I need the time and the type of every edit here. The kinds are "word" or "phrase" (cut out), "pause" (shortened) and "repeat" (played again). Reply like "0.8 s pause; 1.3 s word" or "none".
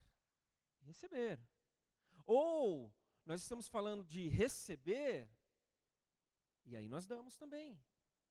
none